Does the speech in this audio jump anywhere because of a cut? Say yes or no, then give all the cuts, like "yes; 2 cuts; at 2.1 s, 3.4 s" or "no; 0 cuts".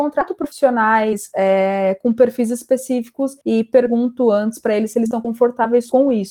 yes; 1 cut; at 3.4 s